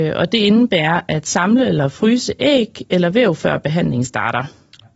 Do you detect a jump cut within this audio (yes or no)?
no